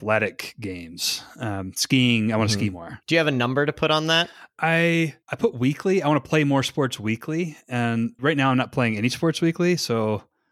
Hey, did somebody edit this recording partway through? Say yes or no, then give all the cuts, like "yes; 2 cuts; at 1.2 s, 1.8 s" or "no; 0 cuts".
yes; 3 cuts; at 3.0 s, 5.2 s, 8.2 s